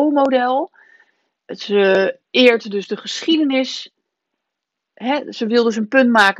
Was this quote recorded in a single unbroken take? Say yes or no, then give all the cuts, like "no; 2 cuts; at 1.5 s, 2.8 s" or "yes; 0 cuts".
yes; 0 cuts